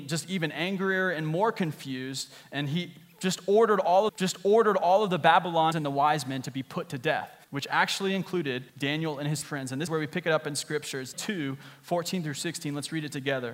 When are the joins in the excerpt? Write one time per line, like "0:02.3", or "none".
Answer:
0:04.1
0:05.7
0:07.4
0:08.7
0:09.4
0:09.9
0:11.1